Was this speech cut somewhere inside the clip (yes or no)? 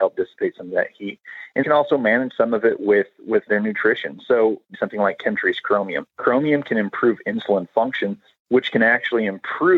yes